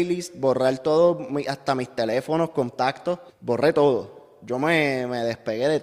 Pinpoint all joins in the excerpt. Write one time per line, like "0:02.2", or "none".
0:03.3